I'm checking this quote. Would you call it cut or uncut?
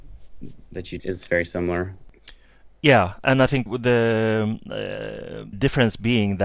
cut